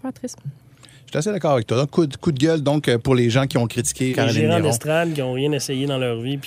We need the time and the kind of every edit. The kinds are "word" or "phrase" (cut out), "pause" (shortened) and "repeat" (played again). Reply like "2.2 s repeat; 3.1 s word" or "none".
4.1 s word